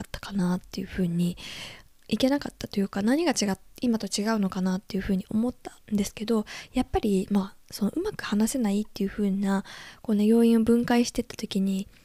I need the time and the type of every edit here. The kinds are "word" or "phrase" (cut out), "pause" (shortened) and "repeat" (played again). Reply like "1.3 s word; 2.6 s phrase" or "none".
5.8 s pause; 7.6 s pause